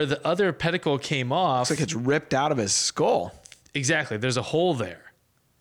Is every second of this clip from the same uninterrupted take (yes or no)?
yes